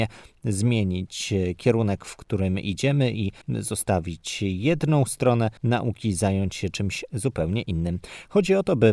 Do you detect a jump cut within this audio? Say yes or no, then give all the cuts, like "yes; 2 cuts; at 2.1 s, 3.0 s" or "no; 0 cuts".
yes; 2 cuts; at 3.4 s, 5.6 s